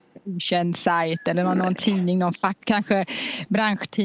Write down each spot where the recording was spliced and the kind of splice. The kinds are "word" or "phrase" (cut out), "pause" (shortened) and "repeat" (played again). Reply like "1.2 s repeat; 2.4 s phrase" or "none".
none